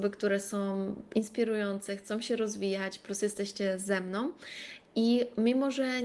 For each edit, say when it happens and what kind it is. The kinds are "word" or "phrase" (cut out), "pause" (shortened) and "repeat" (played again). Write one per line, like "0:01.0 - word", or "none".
none